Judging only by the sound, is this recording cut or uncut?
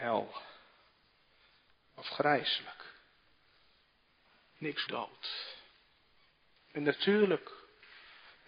cut